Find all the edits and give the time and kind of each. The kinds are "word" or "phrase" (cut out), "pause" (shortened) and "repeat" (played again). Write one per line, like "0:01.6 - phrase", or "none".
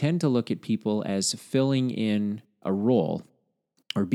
none